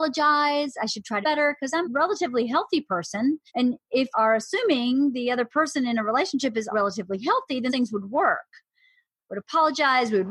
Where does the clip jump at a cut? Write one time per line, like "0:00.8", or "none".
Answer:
0:01.2
0:01.8
0:03.5
0:04.1
0:06.7
0:07.7